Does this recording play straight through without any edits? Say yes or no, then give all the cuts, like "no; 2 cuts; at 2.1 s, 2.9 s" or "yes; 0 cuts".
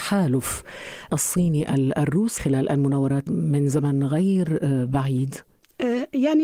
no; 3 cuts; at 1.1 s, 2.4 s, 3.3 s